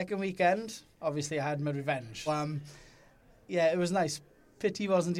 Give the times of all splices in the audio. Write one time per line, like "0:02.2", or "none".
0:00.9
0:02.3

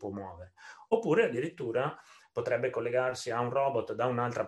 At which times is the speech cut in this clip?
none

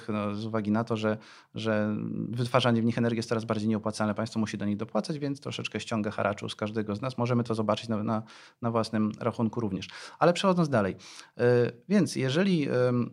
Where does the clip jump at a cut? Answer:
none

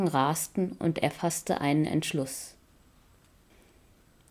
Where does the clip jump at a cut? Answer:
none

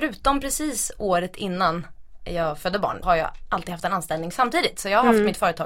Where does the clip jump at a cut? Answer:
0:03.0

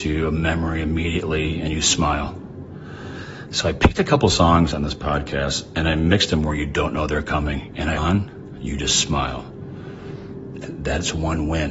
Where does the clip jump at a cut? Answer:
0:08.0
0:10.6

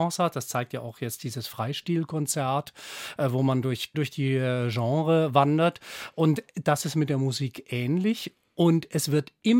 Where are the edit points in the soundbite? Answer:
0:03.9

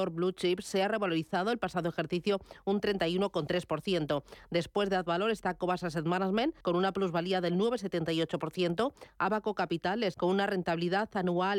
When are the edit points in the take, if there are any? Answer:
0:06.6
0:10.1

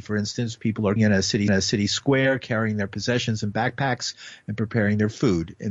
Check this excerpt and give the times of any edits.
0:01.0
0:01.5

